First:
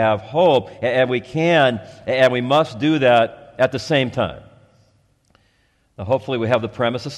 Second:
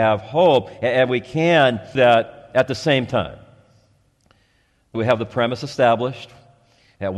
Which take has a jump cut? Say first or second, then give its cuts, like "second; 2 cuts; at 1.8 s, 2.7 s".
second; 2 cuts; at 1.9 s, 4.9 s